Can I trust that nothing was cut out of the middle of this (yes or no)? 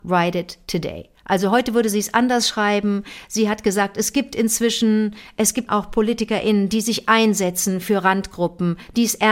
no